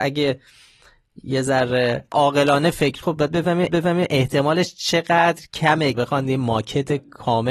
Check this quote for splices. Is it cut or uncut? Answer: cut